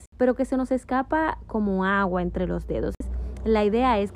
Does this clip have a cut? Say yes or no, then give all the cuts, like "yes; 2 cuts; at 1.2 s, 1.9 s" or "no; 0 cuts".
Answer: no; 0 cuts